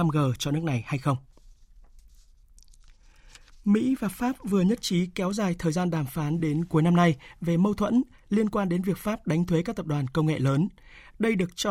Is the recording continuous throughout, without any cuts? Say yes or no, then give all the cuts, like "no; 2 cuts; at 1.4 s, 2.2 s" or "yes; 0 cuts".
yes; 0 cuts